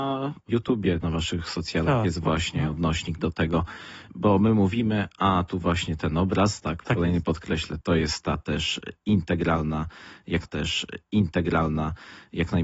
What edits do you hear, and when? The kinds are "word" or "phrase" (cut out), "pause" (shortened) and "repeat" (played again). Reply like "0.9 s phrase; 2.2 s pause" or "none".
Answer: 1.0 s word; 6.9 s word; 10.4 s repeat